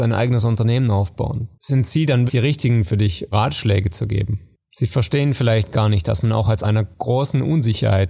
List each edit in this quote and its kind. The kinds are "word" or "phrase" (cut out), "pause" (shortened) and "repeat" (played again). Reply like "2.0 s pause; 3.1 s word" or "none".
1.5 s pause; 2.3 s word; 3.3 s word; 4.6 s pause; 6.6 s phrase